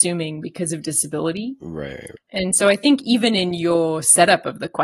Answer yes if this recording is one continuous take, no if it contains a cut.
yes